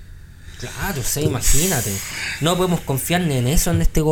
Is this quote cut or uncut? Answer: uncut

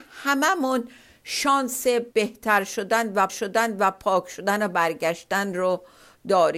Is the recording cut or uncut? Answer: cut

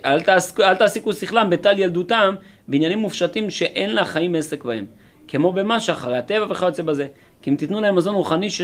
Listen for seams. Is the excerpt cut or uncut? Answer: uncut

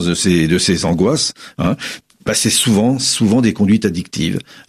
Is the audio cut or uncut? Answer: uncut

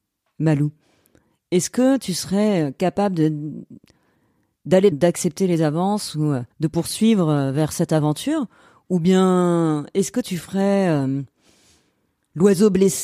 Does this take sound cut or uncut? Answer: cut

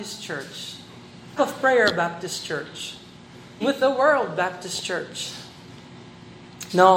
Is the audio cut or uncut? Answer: cut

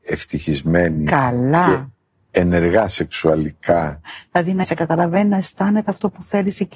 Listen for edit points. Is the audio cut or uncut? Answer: cut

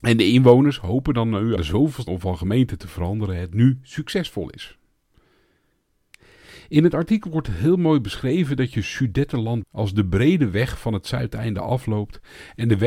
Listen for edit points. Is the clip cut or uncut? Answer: cut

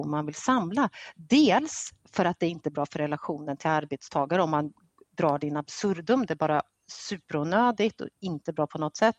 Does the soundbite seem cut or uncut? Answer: uncut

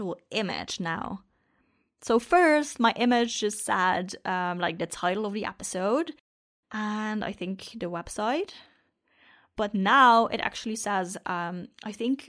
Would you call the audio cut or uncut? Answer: uncut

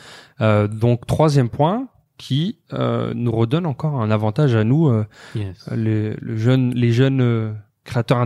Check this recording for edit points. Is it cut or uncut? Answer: uncut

